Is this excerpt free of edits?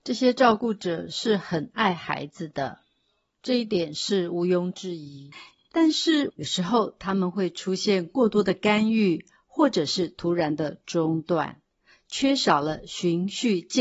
yes; 0 cuts

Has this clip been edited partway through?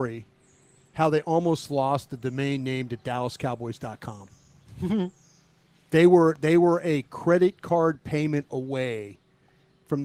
no; 0 cuts

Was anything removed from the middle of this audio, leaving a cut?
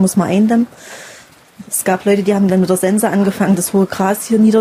no; 0 cuts

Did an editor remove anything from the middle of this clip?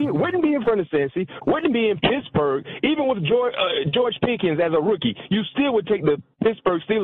no; 0 cuts

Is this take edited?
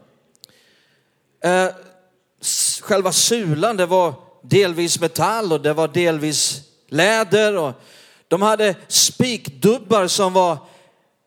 no; 0 cuts

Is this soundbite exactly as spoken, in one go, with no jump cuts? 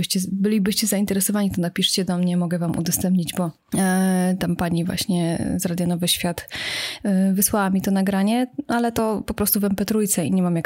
yes; 0 cuts

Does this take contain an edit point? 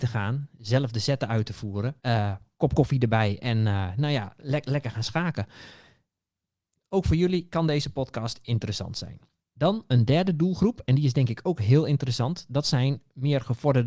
yes; 2 cuts; at 2.0 s, 9.3 s

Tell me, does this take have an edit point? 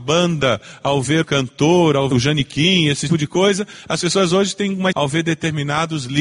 yes; 4 cuts; at 1.2 s, 2.1 s, 3.1 s, 4.9 s

